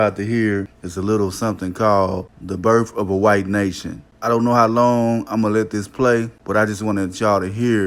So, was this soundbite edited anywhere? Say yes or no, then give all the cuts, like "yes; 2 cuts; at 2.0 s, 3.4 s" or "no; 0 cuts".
no; 0 cuts